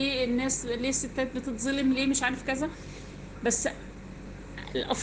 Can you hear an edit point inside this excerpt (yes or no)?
no